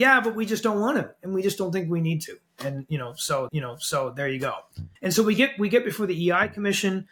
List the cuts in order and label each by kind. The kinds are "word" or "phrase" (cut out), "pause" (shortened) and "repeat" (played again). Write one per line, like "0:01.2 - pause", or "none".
0:03.5 - repeat
0:05.0 - pause